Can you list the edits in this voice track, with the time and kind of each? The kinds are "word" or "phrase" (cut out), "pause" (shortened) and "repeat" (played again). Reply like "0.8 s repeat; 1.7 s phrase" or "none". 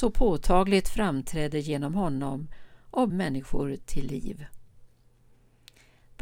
3.1 s word